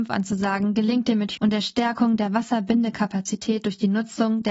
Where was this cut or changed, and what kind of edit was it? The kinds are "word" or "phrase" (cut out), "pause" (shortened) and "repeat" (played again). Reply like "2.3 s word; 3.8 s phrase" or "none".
1.4 s word